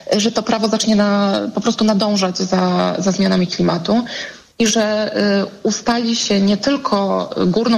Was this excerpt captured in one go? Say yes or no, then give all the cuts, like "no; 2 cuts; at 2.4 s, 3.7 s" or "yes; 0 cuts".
yes; 0 cuts